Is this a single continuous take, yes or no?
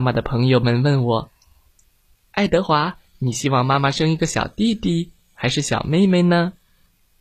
yes